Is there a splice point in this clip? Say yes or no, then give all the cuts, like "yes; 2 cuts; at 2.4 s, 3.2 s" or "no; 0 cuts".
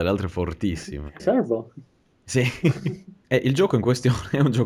yes; 2 cuts; at 1.2 s, 3.2 s